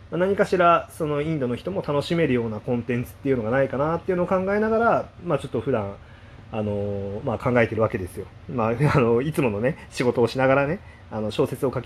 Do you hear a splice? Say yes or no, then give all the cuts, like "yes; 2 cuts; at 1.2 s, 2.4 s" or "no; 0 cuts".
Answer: no; 0 cuts